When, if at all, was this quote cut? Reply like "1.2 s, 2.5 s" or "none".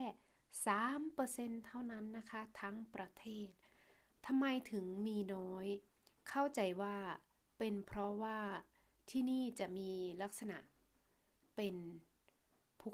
none